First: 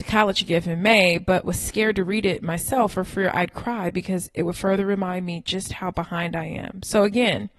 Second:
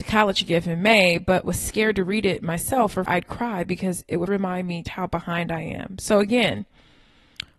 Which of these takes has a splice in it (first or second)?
second